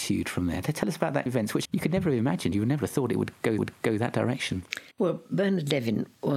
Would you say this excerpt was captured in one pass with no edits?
no; 4 cuts; at 1.3 s, 1.6 s, 3.6 s, 4.9 s

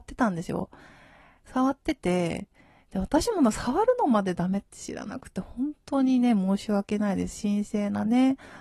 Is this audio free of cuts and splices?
yes; 0 cuts

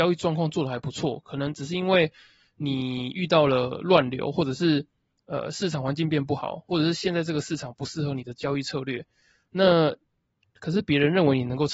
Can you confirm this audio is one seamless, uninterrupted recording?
yes; 0 cuts

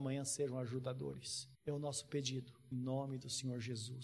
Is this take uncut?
no; 2 cuts; at 1.5 s, 2.7 s

